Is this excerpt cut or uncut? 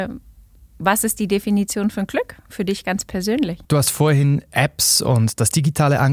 cut